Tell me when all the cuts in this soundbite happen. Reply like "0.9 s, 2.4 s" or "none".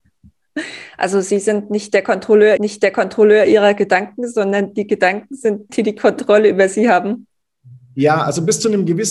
2.6 s, 5.7 s